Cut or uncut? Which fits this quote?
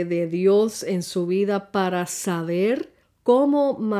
cut